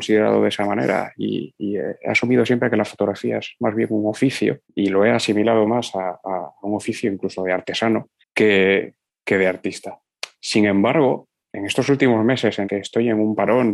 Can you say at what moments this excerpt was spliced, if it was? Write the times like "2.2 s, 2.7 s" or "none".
4.6 s, 8.2 s, 11.5 s, 12.6 s